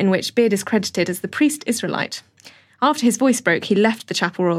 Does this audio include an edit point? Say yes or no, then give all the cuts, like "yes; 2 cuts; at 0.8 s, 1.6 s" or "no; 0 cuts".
no; 0 cuts